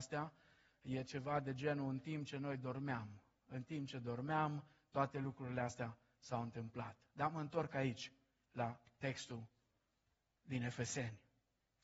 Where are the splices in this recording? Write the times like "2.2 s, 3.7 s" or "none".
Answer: none